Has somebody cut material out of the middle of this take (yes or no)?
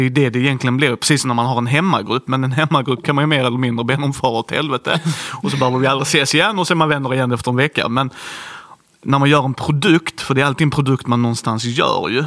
no